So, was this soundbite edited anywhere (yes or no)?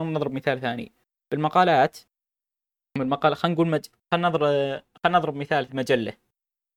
yes